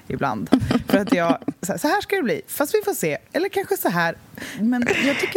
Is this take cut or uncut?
uncut